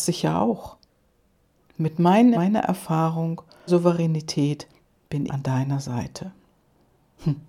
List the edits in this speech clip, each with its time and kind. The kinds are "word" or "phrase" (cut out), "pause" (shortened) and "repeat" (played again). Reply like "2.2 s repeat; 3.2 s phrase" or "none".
2.3 s word; 3.7 s word; 5.3 s word